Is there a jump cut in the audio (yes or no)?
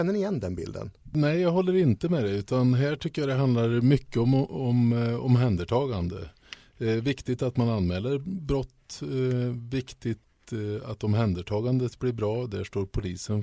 no